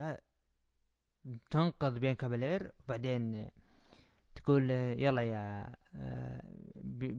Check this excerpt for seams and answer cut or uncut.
uncut